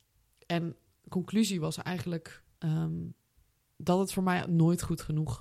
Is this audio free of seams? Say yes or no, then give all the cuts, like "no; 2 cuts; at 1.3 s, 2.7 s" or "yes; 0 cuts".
no; 1 cut; at 2.5 s